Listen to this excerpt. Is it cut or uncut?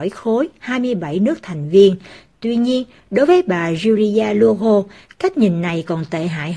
uncut